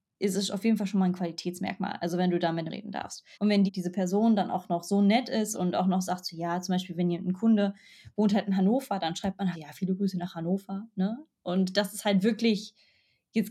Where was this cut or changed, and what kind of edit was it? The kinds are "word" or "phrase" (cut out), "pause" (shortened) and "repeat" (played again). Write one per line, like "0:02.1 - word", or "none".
0:02.7 - word
0:03.3 - pause
0:03.7 - word
0:05.5 - word
0:09.5 - word